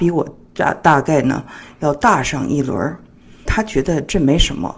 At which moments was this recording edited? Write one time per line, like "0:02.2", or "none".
0:03.5